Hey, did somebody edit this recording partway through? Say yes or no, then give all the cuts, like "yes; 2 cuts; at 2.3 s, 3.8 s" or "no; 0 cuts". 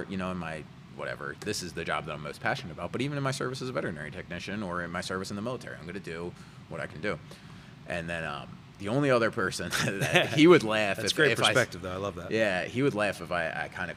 no; 0 cuts